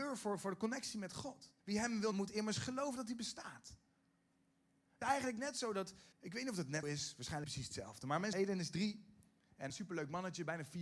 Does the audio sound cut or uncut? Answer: cut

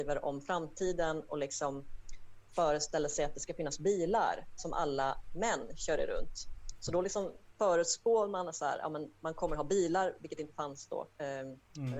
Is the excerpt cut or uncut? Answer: cut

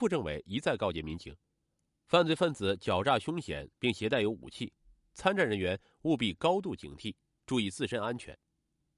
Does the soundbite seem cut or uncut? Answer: uncut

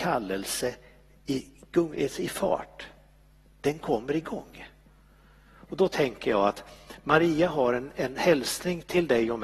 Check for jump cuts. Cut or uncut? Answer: uncut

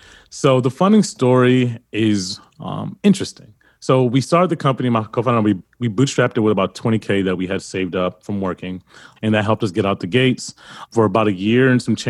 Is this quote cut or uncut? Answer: uncut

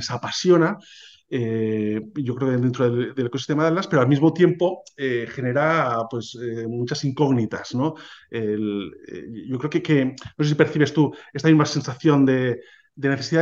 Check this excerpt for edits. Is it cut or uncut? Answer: uncut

